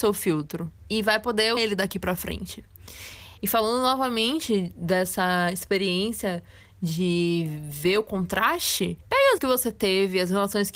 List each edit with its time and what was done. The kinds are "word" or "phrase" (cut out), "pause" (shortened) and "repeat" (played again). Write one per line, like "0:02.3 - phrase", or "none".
0:01.6 - word
0:09.4 - word